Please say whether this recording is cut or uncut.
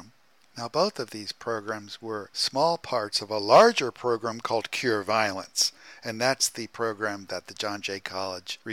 uncut